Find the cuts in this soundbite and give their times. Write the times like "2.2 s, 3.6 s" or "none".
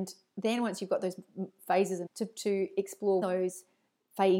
2.1 s, 3.2 s